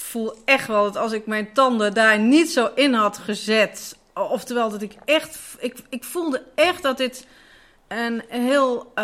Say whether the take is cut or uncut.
uncut